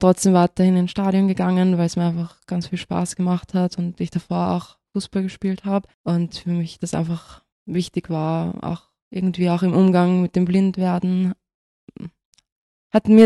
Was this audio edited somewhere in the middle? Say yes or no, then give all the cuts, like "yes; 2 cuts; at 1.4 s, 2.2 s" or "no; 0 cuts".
yes; 2 cuts; at 5.9 s, 7.5 s